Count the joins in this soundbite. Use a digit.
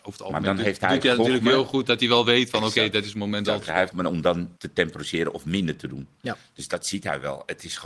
3